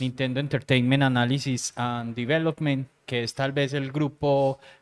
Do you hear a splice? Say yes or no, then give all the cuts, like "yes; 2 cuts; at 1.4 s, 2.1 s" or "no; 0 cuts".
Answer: no; 0 cuts